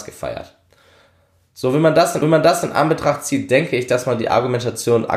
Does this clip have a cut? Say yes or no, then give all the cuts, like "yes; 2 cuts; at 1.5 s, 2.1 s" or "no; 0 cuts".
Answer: yes; 1 cut; at 2.2 s